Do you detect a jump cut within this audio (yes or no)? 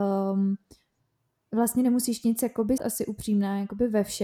yes